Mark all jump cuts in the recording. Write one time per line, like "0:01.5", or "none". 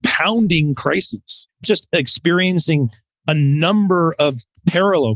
0:01.6